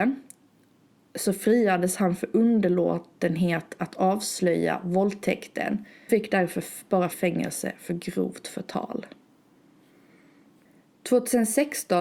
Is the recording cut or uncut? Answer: cut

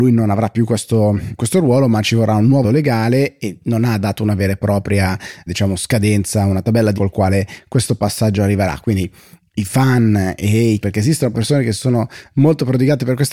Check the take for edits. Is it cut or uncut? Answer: cut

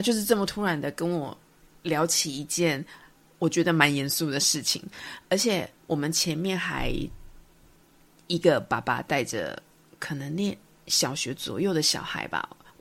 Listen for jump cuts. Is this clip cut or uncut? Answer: uncut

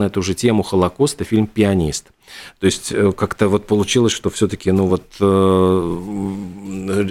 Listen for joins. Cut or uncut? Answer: uncut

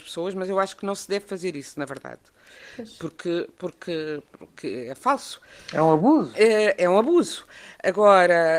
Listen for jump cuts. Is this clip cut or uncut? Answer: uncut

